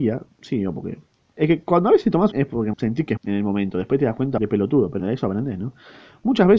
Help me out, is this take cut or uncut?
cut